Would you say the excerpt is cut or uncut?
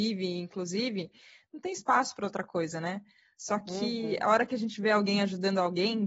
uncut